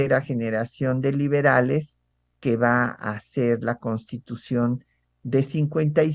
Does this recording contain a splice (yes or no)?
no